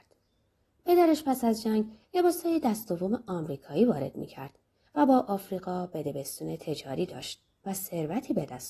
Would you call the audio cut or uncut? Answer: uncut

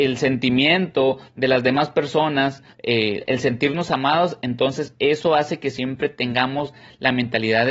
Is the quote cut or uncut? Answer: cut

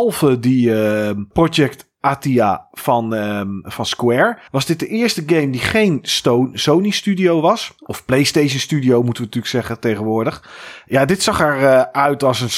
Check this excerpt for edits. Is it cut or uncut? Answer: cut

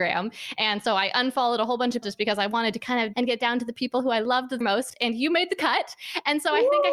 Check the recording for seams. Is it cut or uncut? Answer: cut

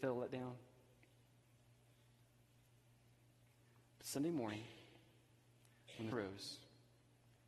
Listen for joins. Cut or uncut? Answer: cut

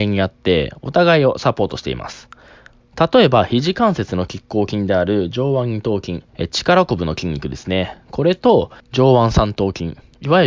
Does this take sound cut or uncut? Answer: cut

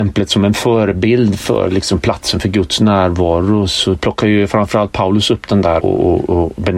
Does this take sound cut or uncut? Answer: cut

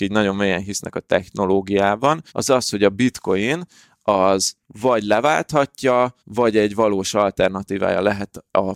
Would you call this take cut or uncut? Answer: cut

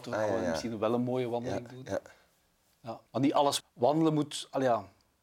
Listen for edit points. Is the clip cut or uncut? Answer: cut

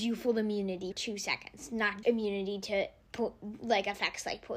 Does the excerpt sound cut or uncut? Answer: cut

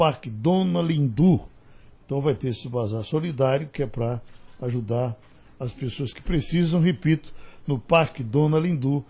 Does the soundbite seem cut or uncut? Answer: uncut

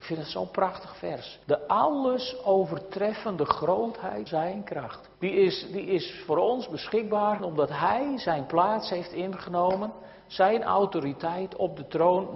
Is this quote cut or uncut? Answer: cut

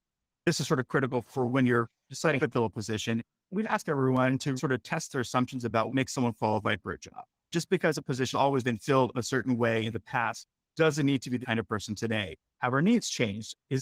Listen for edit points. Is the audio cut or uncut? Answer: cut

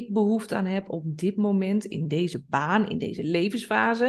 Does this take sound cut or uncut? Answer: uncut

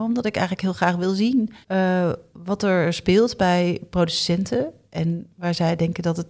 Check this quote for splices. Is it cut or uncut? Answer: cut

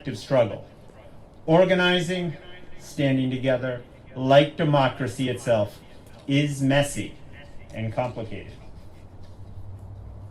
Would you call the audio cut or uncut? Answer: uncut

